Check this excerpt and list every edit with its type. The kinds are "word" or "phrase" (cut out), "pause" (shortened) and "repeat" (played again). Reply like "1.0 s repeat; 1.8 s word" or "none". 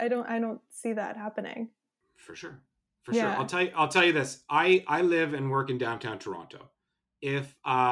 none